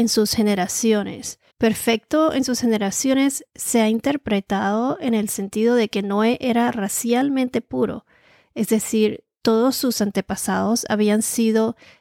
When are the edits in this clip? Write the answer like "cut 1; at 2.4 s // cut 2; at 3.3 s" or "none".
cut 1; at 1.5 s